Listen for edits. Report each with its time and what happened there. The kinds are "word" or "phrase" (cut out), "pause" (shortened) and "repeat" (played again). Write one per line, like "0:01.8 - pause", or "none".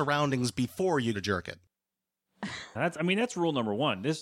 0:01.1 - word
0:02.7 - word